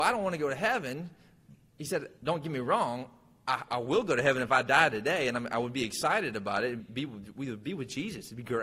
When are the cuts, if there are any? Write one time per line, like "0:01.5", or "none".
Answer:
0:02.2
0:03.7
0:06.8